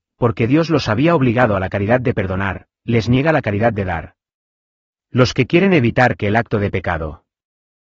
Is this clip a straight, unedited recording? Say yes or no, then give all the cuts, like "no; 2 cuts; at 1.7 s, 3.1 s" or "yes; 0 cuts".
yes; 0 cuts